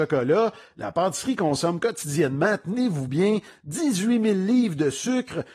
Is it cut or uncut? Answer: uncut